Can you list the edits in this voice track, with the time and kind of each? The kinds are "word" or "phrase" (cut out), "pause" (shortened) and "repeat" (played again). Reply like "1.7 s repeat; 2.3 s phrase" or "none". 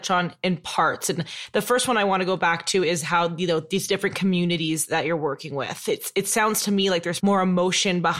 7.2 s word